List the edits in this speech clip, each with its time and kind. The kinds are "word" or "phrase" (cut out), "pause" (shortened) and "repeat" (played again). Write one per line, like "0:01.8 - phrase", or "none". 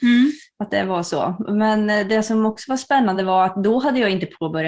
none